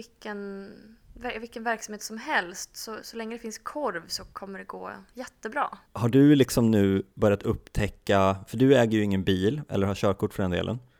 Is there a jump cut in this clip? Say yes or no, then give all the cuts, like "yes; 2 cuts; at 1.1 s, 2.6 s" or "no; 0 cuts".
yes; 2 cuts; at 4.3 s, 5.8 s